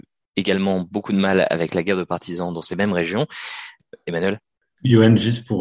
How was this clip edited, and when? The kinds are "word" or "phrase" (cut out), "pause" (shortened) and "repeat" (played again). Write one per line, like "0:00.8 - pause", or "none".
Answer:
none